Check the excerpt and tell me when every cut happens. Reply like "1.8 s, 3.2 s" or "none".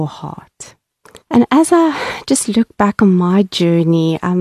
1.2 s